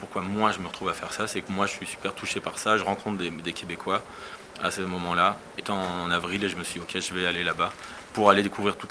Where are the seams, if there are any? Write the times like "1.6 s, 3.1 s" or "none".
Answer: 5.6 s